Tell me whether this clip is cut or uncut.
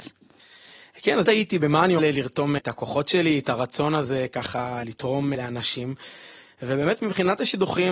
cut